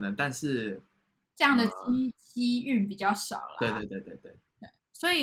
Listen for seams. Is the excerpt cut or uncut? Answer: uncut